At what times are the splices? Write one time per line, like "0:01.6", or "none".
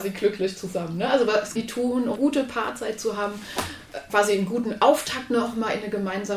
0:01.6
0:02.2
0:04.1